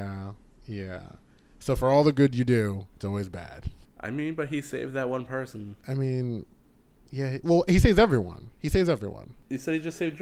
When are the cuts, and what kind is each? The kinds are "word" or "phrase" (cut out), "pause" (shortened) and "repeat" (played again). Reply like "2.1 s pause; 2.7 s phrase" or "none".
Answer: 2.9 s pause; 5.8 s pause

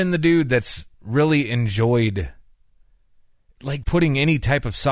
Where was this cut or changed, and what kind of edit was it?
0.9 s pause; 3.8 s word

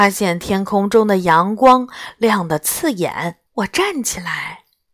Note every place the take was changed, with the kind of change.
3.5 s pause

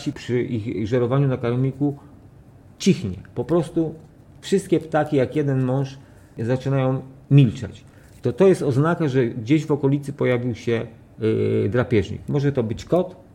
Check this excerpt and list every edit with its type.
none

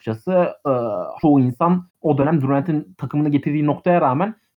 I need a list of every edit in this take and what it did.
1.2 s word; 1.9 s pause

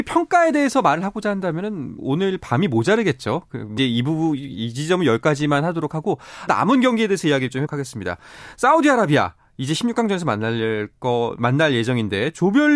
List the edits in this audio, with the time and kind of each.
2.0 s word; 3.8 s word; 6.5 s word; 7.7 s word

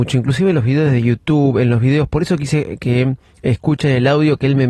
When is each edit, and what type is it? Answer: none

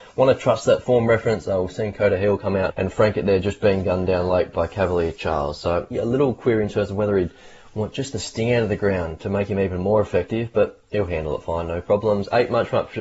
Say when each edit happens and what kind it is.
2.7 s word; 5.9 s word

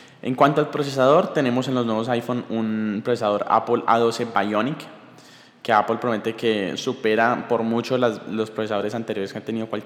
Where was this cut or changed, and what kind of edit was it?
none

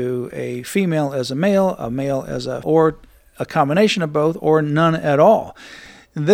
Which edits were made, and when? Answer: 2.6 s word

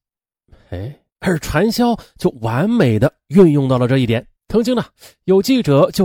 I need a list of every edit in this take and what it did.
1.1 s pause; 4.4 s pause

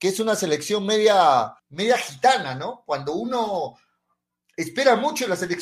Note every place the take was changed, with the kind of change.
1.6 s pause

